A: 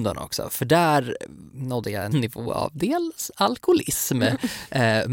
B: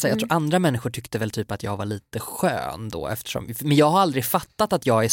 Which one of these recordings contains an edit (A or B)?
A